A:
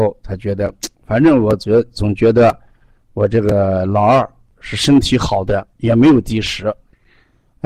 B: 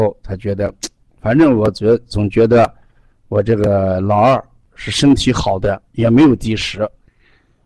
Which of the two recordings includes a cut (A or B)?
A